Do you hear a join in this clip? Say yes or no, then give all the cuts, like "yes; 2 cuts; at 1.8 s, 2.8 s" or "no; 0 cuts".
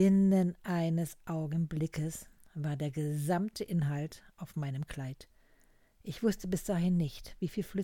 no; 0 cuts